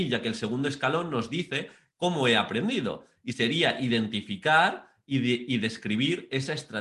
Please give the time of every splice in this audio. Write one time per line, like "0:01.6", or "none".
none